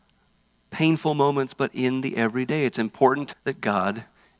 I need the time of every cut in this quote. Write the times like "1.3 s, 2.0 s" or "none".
3.3 s